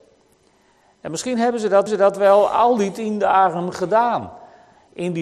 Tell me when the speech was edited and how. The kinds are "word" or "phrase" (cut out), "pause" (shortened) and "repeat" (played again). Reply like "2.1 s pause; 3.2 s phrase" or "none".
1.9 s repeat